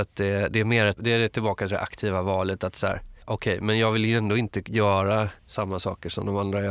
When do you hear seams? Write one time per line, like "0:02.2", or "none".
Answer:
0:01.0
0:03.2
0:05.4